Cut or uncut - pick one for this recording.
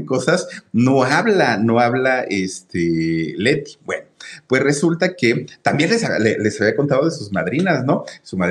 uncut